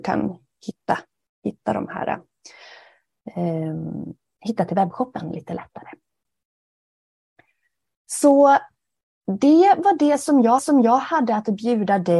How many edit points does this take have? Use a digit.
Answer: 1